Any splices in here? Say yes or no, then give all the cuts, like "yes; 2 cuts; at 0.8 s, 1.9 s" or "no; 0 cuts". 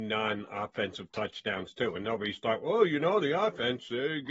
no; 0 cuts